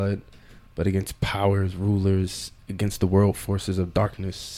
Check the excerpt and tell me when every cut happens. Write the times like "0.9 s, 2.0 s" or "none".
none

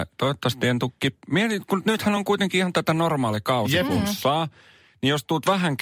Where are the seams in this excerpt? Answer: none

